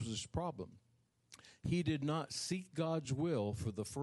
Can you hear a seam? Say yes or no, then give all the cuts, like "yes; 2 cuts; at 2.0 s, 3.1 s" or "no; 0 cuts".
no; 0 cuts